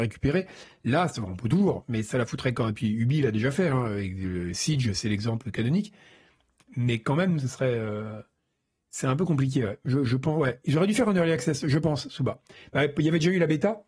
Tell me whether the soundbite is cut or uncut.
uncut